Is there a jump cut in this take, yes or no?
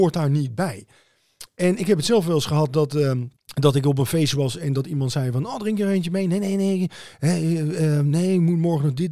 yes